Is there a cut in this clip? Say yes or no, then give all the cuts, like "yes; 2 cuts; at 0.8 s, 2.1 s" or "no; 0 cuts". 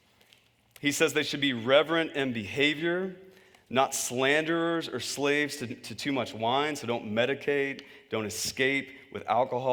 no; 0 cuts